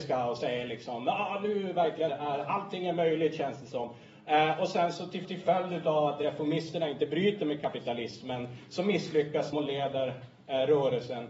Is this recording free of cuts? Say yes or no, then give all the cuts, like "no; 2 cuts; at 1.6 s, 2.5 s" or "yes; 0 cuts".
no; 3 cuts; at 2.1 s, 5.2 s, 9.5 s